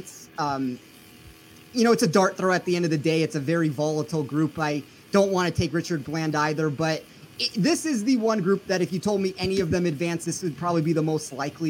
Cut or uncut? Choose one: uncut